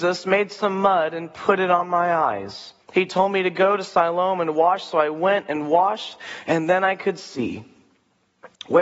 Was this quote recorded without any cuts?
no; 1 cut; at 2.8 s

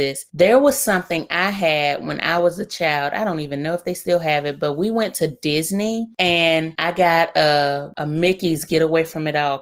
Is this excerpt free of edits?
yes; 0 cuts

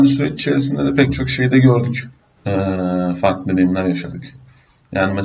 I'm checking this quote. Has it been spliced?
yes; 1 cut; at 2.2 s

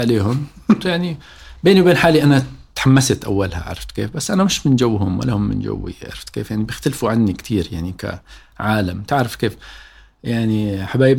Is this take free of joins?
yes; 0 cuts

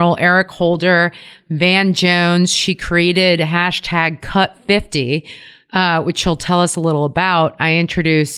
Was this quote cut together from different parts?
no; 0 cuts

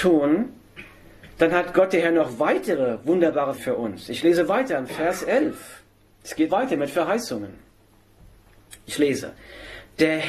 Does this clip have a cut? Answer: yes; 3 cuts; at 1.3 s, 3.6 s, 6.5 s

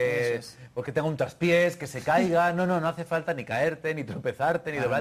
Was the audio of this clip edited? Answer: no; 0 cuts

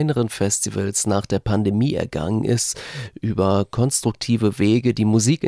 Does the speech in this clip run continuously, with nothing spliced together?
yes; 0 cuts

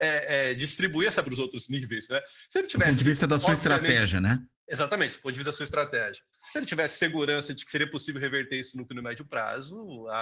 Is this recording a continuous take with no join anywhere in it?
no; 3 cuts; at 1.2 s, 4.5 s, 8.9 s

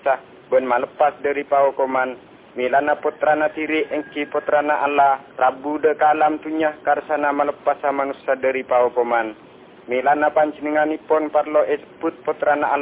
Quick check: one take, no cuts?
no; 1 cut; at 5.3 s

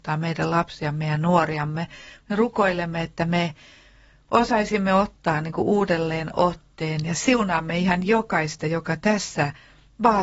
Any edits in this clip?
no; 0 cuts

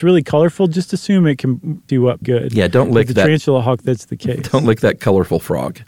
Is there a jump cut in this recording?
yes; 2 cuts; at 1.9 s, 2.2 s

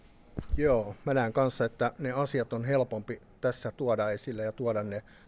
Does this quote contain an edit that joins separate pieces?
yes; 1 cut; at 3.7 s

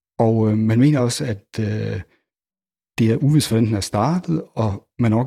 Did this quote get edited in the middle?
no; 0 cuts

